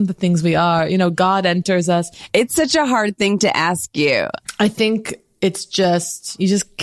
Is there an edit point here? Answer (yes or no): no